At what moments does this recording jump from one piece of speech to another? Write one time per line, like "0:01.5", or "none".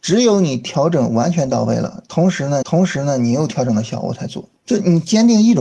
0:02.6
0:04.6